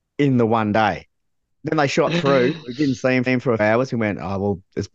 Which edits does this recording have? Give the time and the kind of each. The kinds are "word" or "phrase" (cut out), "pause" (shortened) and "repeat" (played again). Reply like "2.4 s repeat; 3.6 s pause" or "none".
1.5 s word; 3.3 s repeat; 3.6 s word